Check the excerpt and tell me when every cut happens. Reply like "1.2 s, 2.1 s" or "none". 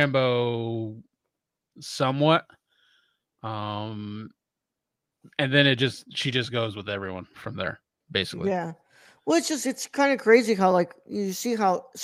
none